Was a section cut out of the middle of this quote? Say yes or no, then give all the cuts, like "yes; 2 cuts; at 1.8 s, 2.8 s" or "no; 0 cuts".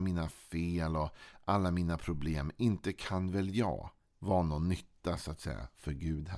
yes; 1 cut; at 4.0 s